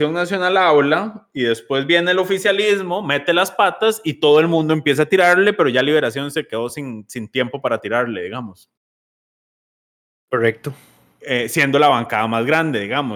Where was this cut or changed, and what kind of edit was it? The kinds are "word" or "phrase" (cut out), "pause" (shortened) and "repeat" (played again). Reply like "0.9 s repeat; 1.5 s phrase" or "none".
none